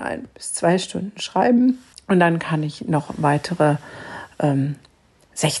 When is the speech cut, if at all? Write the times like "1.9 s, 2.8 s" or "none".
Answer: 1.9 s